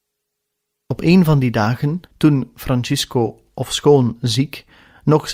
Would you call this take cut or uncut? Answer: cut